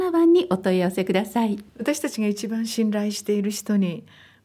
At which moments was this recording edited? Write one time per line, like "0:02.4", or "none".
0:01.7